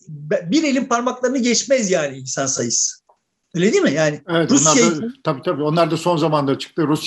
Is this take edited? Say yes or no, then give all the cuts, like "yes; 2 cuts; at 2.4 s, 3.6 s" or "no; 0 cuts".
no; 0 cuts